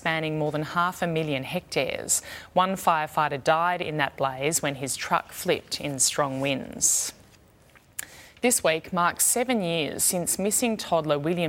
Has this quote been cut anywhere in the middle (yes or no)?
no